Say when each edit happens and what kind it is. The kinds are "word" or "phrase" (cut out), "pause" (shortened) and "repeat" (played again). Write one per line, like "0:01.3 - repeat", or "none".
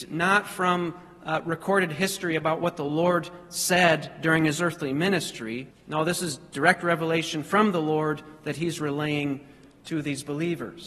0:05.7 - pause